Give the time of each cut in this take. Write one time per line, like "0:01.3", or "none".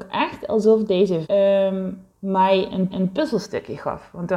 0:01.2
0:02.1
0:02.9